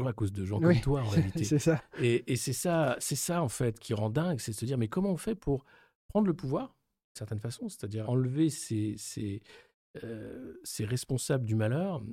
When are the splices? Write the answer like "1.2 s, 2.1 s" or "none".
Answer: 3.8 s, 8.0 s